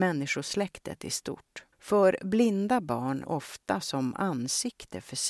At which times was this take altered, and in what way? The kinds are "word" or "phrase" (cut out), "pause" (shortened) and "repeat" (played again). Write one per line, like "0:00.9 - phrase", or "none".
0:01.7 - pause
0:03.2 - phrase